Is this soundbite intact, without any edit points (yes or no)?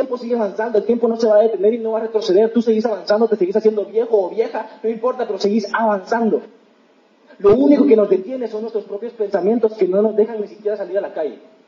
yes